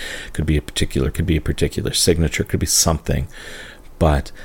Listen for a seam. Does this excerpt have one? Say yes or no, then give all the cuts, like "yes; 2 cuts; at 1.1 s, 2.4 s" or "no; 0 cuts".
yes; 1 cut; at 1.1 s